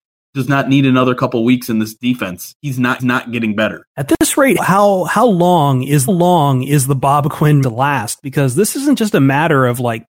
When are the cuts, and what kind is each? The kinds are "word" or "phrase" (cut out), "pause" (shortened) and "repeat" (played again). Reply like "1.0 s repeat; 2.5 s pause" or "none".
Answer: 3.0 s repeat; 3.9 s pause; 4.6 s word; 6.1 s repeat; 7.6 s phrase